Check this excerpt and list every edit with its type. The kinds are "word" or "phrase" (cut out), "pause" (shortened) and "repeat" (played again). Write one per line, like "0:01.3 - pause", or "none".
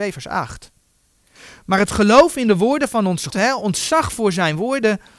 0:03.3 - word